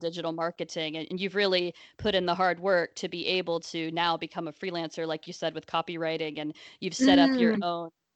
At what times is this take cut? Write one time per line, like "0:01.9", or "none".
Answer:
none